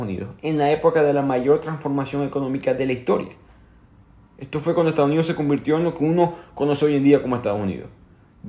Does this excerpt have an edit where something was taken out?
no; 0 cuts

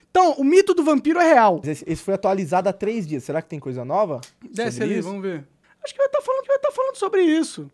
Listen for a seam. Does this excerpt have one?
yes; 3 cuts; at 1.6 s, 5.6 s, 6.4 s

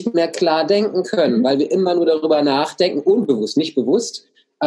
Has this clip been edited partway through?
no; 0 cuts

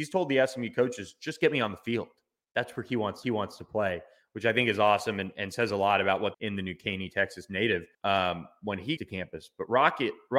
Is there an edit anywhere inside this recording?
yes; 4 cuts; at 3.2 s, 6.3 s, 7.9 s, 9.0 s

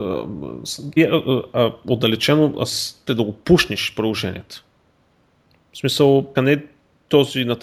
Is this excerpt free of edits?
no; 3 cuts; at 1.0 s, 3.1 s, 6.4 s

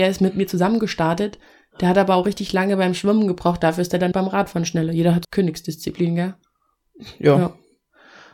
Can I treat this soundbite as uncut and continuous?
no; 2 cuts; at 4.1 s, 5.2 s

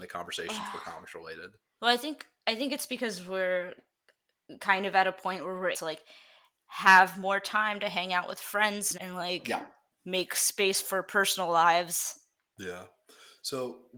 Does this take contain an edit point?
yes; 2 cuts; at 5.7 s, 8.9 s

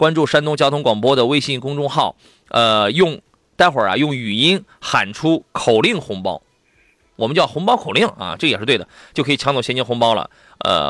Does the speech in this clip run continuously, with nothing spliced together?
yes; 0 cuts

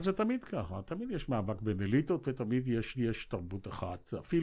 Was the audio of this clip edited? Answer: yes; 1 cut; at 2.9 s

